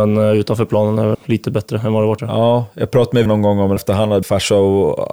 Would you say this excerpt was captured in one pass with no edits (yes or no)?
no